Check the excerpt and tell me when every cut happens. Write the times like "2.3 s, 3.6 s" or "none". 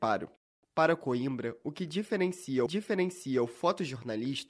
2.7 s